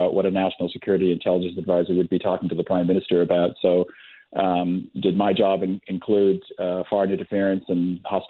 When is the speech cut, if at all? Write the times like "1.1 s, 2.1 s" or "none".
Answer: none

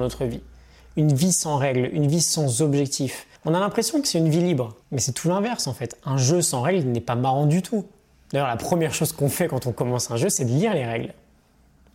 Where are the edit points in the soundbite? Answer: 3.4 s, 4.8 s, 8.1 s

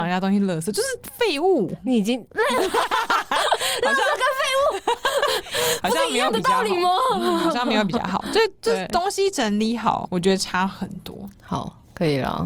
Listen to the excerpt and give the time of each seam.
10.1 s

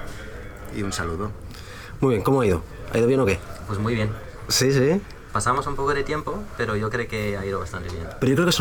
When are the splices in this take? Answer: none

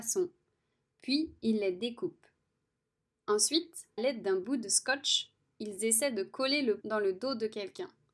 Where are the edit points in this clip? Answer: 4.0 s, 6.8 s

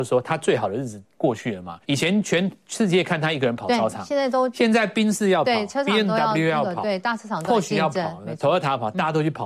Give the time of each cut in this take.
1.8 s

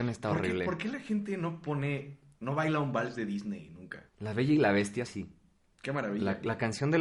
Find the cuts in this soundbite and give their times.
4.1 s, 5.1 s

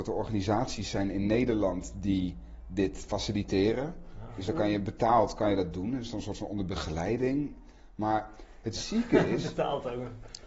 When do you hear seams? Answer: none

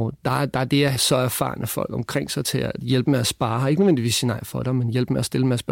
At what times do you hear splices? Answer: 0.9 s

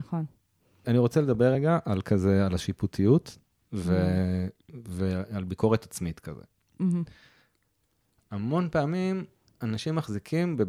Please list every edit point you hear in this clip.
none

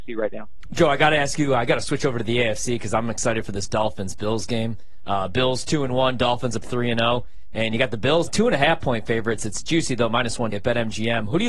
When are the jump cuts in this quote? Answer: 6.6 s, 8.3 s, 10.5 s

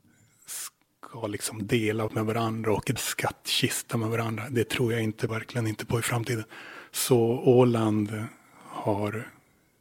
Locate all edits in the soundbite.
2.1 s, 3.0 s, 5.3 s

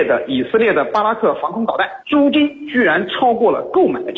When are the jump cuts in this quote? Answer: 2.0 s

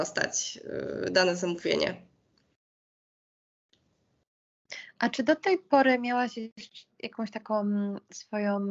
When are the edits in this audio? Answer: none

